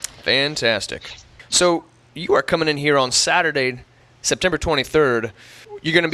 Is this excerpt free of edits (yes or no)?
yes